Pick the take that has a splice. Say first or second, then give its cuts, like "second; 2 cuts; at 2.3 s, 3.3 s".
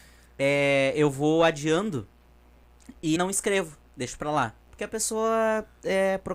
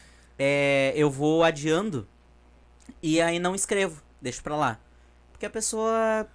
first; 2 cuts; at 3.2 s, 4.6 s